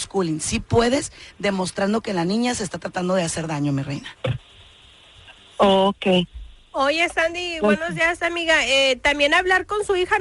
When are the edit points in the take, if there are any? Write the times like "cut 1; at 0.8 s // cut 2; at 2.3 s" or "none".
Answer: none